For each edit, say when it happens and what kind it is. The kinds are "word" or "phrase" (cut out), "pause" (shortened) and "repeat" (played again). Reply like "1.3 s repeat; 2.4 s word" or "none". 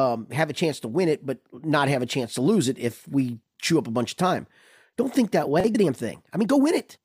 3.5 s pause; 5.7 s word